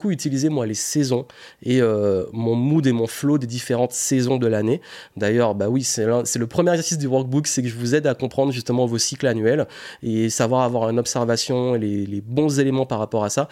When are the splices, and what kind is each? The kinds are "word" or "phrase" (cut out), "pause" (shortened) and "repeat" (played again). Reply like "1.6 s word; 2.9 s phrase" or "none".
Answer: none